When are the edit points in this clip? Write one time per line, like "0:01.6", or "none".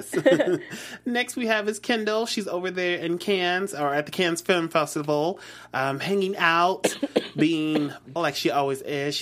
0:08.2